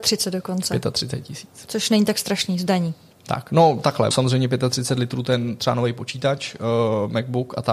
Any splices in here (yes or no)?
yes